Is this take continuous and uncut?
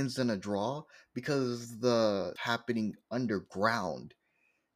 no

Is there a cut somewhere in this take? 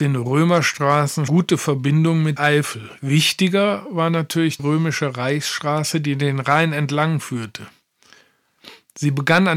yes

